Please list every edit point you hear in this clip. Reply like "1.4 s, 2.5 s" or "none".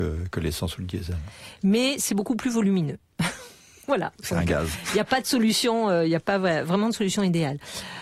none